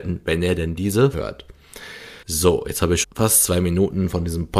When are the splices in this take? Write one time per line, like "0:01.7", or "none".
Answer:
0:01.1
0:02.2
0:03.0